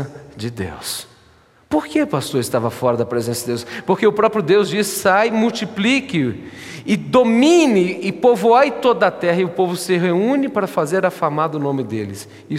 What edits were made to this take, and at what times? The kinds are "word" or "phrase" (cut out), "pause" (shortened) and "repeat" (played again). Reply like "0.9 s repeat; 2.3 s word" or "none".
none